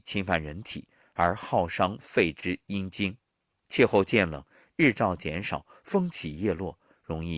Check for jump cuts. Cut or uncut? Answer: cut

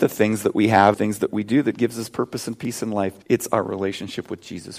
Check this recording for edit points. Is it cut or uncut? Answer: cut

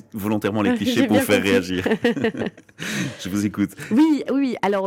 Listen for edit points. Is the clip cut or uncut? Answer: uncut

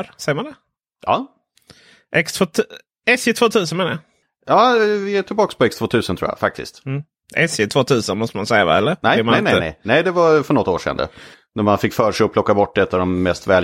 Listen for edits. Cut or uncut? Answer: uncut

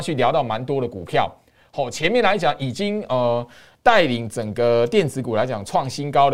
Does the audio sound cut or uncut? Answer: uncut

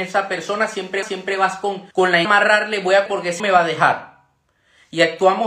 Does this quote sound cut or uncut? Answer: cut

